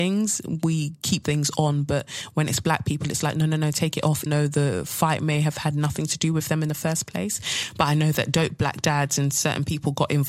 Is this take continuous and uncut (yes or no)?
no